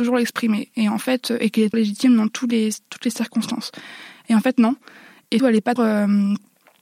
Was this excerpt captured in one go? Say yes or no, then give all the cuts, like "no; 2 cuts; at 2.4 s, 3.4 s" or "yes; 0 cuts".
no; 3 cuts; at 1.7 s, 5.4 s, 5.8 s